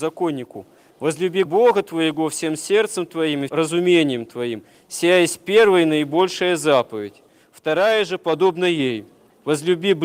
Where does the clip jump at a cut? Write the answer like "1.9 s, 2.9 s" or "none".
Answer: 1.5 s, 3.5 s